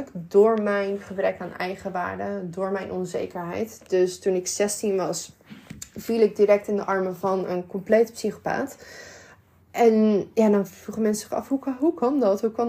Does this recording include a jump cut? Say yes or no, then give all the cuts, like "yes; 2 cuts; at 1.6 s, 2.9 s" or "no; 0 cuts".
no; 0 cuts